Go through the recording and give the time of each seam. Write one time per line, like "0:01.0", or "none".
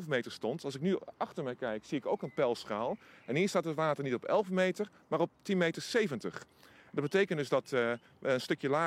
none